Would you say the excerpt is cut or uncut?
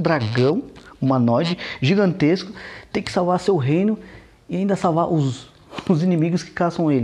uncut